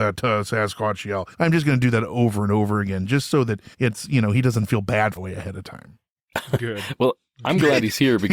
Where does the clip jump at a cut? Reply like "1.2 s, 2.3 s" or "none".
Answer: 1.3 s, 3.7 s, 5.2 s